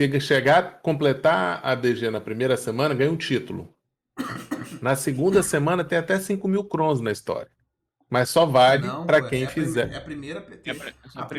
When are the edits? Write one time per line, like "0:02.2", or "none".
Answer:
none

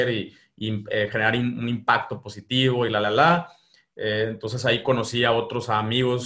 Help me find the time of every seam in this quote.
none

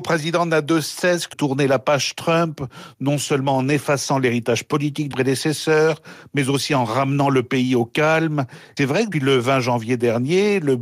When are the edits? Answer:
0:01.3
0:05.1
0:08.8
0:09.1

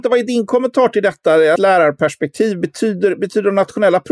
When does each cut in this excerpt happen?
0:01.6

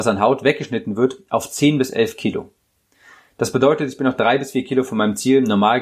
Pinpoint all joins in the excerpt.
none

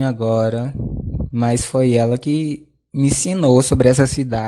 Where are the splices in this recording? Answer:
none

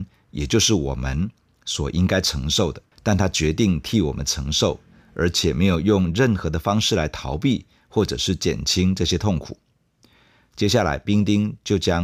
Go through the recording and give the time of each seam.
0:02.9

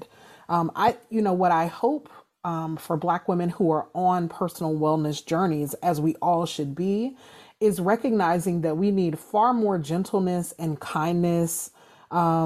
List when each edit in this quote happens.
none

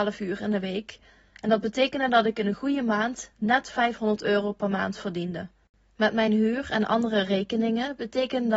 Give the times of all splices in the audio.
none

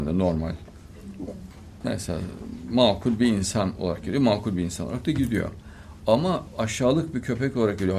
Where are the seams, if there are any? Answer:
none

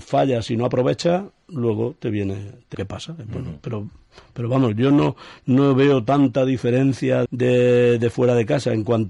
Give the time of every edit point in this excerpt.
0:02.7
0:07.3

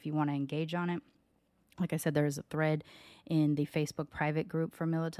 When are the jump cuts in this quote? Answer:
none

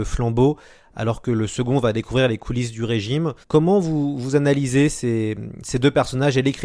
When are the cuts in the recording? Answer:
0:03.4

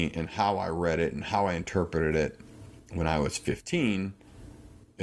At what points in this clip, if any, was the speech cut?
none

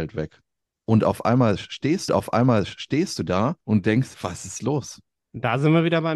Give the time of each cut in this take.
0:02.1
0:03.6
0:04.1
0:05.1

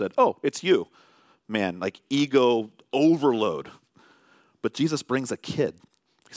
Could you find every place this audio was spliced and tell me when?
none

